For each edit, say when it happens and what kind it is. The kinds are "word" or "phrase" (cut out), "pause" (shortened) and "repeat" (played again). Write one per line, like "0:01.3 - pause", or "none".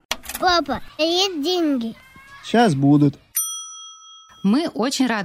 0:01.0 - phrase